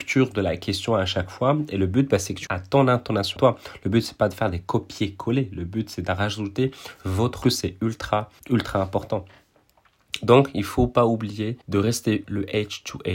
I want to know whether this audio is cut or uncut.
cut